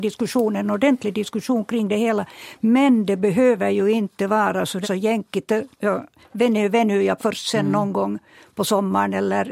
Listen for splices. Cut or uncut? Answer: cut